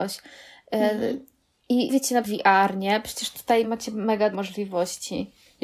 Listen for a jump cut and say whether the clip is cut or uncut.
cut